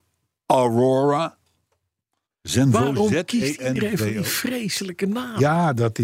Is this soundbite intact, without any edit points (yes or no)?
yes